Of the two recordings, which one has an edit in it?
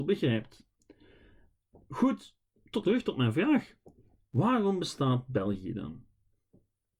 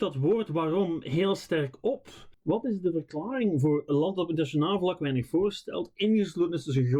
second; 1 cut; at 2.3 s

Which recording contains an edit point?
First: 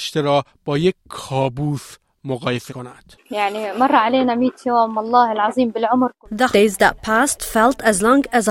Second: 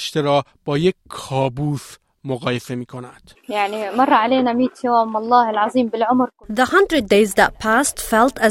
first; 2 cuts; at 2.7 s, 6.5 s

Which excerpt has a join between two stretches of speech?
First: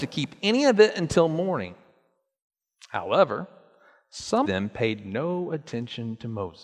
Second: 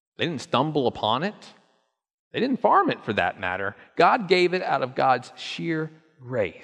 first; 1 cut; at 4.4 s

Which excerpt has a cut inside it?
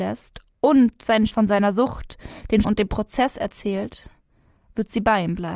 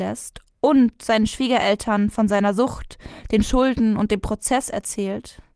first; 2 cuts; at 1.3 s, 2.6 s

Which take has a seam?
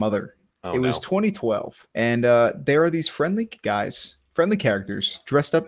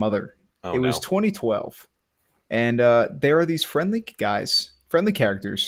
first; 1 cut; at 1.9 s

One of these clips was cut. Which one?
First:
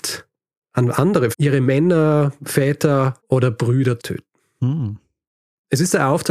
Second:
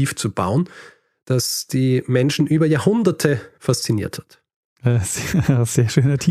first; 3 cuts; at 1.3 s, 3.2 s, 4.0 s

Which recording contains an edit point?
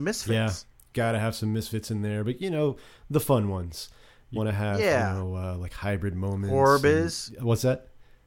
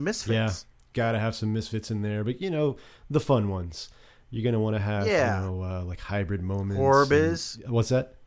first; 1 cut; at 4.4 s

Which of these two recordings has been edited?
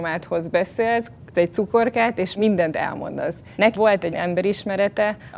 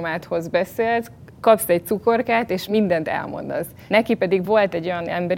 first; 3 cuts; at 1.3 s, 3.8 s, 4.1 s

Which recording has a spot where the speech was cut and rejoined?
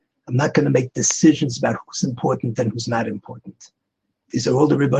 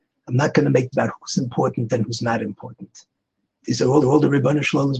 second; 2 cuts; at 0.9 s, 4.0 s

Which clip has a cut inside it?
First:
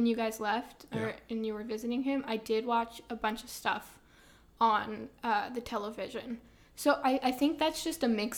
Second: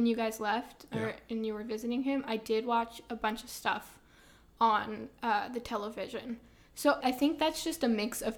second; 1 cut; at 7.0 s

